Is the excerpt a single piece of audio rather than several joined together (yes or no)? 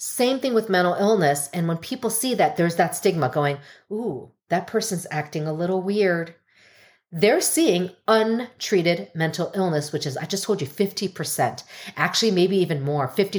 yes